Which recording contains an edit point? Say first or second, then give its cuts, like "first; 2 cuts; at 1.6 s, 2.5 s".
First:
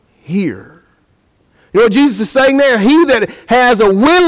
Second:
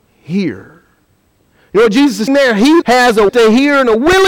second; 3 cuts; at 2.3 s, 2.8 s, 3.3 s